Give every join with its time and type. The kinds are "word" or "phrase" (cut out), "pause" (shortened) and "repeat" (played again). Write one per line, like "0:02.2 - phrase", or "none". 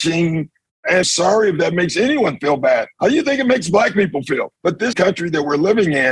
0:01.0 - word
0:02.9 - pause
0:04.6 - pause
0:04.9 - phrase

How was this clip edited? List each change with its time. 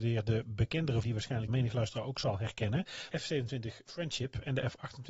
0:01.0 - word
0:01.5 - word
0:03.1 - word

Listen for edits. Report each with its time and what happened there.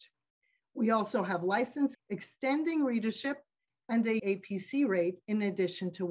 0:01.9 - word
0:04.2 - word

